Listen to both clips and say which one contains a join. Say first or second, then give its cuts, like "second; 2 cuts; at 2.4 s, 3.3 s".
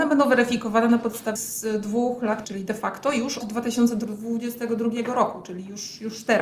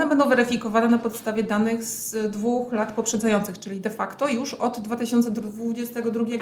first; 3 cuts; at 1.4 s, 2.4 s, 3.4 s